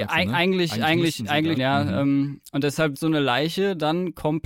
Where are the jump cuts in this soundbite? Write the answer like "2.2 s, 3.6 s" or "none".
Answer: 1.6 s, 2.9 s